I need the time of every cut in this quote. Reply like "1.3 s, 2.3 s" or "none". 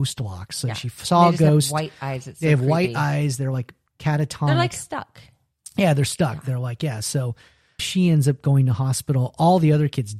7.8 s